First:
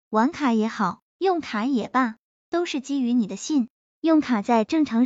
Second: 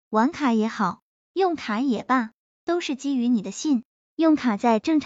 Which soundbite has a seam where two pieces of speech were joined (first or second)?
first